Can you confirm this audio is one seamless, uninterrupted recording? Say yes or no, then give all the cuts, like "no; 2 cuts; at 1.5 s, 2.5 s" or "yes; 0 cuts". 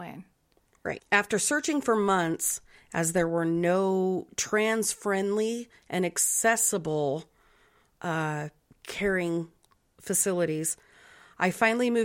yes; 0 cuts